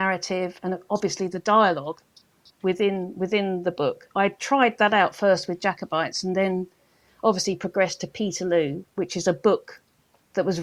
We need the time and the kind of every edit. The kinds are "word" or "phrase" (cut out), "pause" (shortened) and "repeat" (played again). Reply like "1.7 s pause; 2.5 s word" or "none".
none